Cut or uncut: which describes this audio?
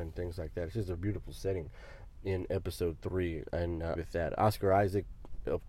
cut